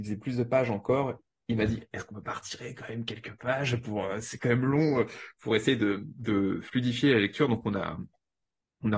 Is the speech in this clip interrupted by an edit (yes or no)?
no